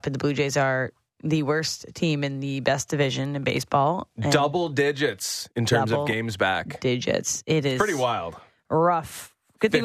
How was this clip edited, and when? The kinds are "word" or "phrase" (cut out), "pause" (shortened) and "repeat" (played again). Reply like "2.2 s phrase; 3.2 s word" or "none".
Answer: none